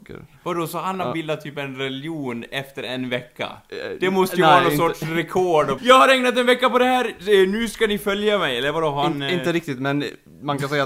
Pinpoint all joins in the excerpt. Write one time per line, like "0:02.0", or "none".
0:05.8